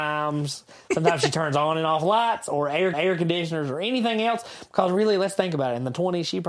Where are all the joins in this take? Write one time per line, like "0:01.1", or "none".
0:02.9